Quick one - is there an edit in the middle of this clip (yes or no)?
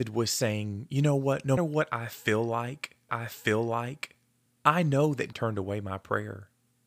yes